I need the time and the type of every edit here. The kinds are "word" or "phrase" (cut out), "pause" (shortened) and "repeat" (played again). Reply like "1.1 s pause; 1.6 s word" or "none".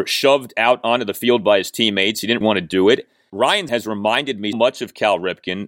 2.4 s word; 3.7 s word; 4.5 s word